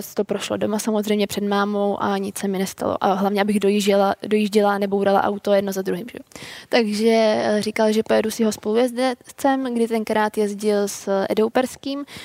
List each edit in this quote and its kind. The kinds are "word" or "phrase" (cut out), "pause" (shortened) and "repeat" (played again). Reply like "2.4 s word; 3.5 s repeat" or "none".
none